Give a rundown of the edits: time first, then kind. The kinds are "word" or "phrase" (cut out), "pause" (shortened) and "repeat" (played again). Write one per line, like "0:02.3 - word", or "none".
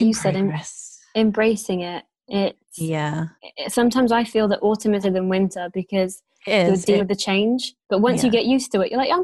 0:03.4 - pause
0:05.0 - word
0:07.0 - phrase
0:07.8 - pause